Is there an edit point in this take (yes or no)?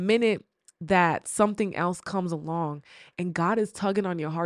no